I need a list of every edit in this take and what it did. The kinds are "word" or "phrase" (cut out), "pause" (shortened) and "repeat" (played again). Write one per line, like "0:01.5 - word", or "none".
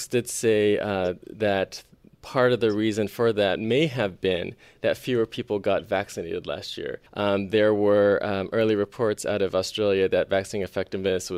0:07.1 - pause